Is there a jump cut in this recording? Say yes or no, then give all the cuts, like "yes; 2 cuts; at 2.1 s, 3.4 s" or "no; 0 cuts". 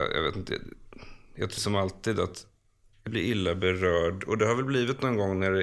yes; 2 cuts; at 1.6 s, 3.1 s